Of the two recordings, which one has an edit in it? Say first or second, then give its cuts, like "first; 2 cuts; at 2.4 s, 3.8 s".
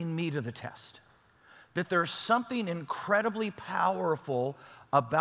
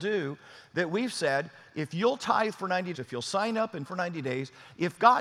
second; 2 cuts; at 2.9 s, 3.8 s